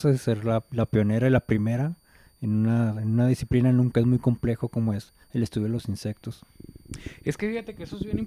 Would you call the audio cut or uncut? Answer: cut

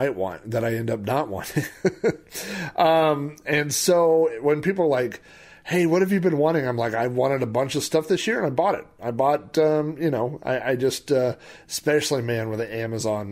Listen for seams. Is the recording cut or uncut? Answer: uncut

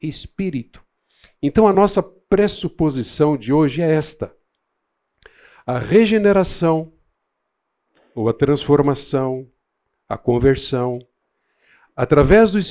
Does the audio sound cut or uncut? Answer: uncut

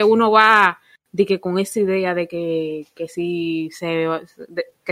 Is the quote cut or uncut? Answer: uncut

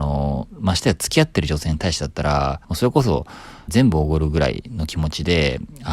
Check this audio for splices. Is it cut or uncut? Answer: cut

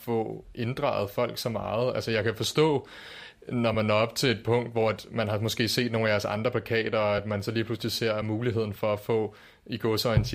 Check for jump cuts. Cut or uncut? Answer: uncut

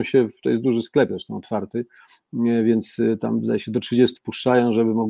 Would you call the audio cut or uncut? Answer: cut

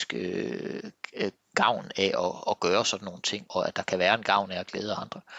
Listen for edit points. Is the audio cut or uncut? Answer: cut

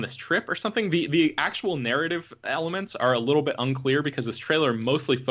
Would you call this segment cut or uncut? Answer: uncut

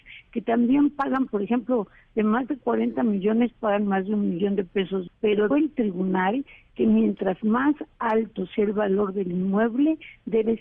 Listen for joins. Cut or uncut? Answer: cut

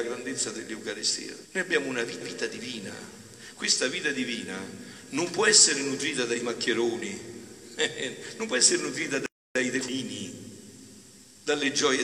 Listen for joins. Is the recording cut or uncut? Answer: cut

